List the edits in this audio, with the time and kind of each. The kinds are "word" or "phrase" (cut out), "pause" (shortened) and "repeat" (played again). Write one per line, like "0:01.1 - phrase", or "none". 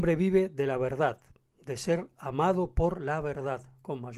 none